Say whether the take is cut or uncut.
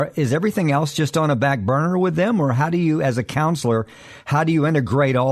uncut